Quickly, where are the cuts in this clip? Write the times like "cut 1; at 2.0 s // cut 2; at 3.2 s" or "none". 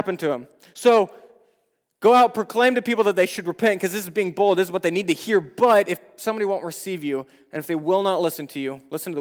none